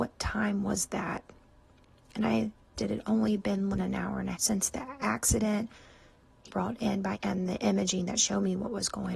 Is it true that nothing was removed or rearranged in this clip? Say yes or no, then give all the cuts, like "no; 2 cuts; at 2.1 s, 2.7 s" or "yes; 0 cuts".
no; 5 cuts; at 2.8 s, 3.7 s, 4.3 s, 6.5 s, 7.1 s